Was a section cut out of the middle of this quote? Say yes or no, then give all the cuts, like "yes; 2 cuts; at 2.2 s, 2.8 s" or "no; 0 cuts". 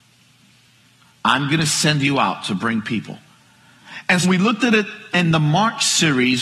yes; 1 cut; at 4.2 s